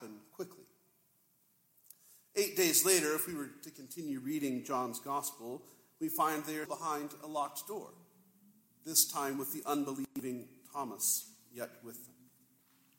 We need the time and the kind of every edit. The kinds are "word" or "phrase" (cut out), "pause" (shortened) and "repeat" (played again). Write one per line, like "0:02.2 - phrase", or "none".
0:06.7 - word